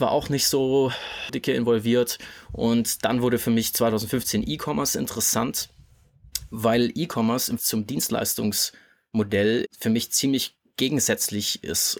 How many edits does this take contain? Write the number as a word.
three